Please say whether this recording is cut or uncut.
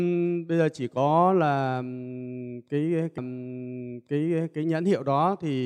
cut